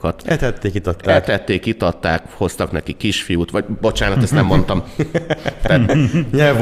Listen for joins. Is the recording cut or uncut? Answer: uncut